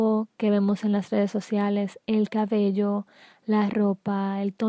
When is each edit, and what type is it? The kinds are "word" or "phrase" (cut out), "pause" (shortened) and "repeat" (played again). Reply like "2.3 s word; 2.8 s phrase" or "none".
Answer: none